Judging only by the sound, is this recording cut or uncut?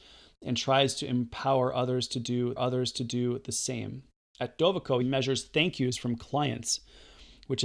cut